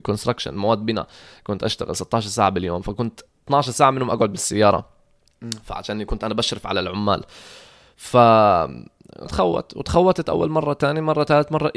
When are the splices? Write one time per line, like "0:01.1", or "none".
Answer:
0:09.3